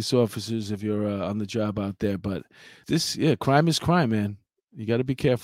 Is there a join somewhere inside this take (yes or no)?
yes